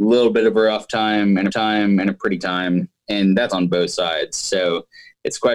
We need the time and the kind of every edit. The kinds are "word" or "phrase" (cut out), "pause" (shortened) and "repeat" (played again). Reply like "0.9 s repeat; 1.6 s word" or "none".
1.5 s repeat; 2.4 s word; 3.5 s phrase